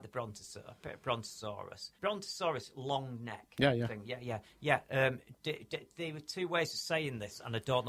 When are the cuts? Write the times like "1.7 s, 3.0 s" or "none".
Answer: 2.0 s